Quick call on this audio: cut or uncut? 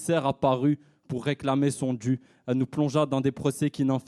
uncut